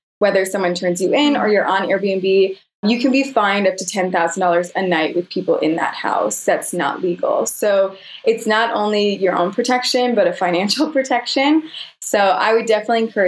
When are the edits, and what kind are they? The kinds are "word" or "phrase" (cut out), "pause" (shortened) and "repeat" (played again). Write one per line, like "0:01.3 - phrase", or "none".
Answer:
none

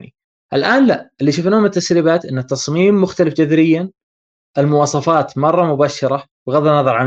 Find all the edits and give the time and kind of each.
none

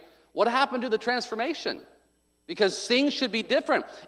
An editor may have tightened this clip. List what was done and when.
none

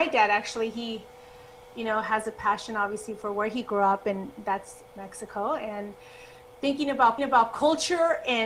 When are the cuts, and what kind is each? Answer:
0:07.2 - repeat

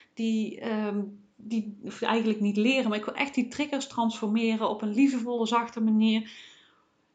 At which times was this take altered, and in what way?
none

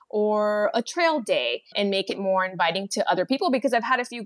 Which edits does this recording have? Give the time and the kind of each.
0:01.7 - word

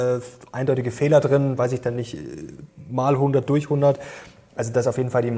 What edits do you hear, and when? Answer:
none

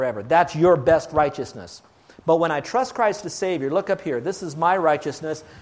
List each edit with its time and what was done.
none

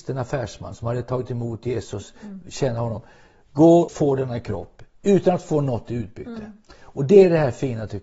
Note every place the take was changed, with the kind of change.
0:03.9 - word

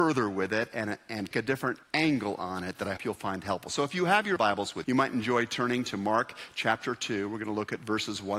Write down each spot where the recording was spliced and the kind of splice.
0:01.3 - word
0:01.8 - pause
0:03.0 - word
0:04.4 - word
0:04.8 - word

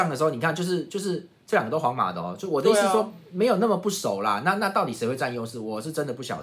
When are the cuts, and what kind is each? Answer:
none

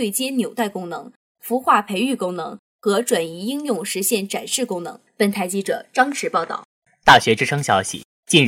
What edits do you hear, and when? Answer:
none

